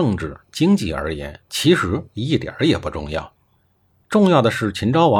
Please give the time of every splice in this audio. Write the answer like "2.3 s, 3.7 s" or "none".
none